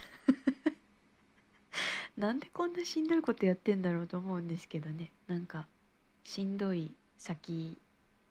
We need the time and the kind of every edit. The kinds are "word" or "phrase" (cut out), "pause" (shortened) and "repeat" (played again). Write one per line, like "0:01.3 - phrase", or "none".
0:05.2 - pause